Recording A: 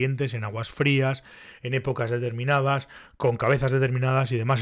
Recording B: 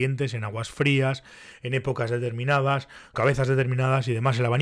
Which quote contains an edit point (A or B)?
B